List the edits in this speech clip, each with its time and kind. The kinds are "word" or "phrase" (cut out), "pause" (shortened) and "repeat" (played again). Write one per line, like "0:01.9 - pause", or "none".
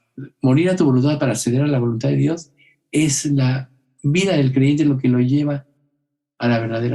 none

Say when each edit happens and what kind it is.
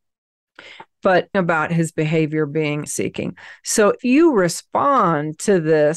0:01.3 - phrase
0:02.9 - word
0:04.0 - word

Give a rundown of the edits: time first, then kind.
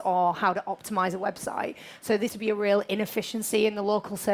0:02.3 - word

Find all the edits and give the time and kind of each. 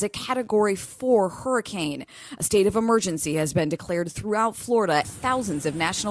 0:05.0 - word

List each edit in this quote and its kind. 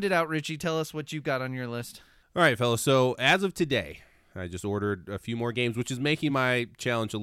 none

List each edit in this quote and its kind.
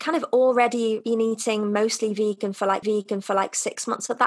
0:02.8 - repeat

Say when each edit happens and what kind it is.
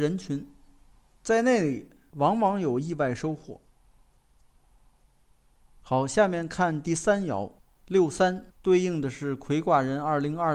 0:08.5 - pause

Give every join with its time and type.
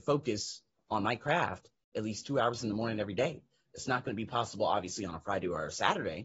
none

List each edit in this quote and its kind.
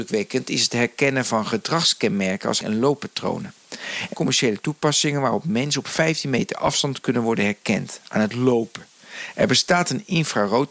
0:02.6 - word
0:04.1 - word

